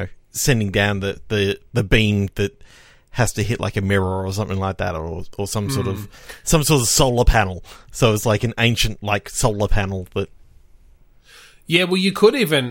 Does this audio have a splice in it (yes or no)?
no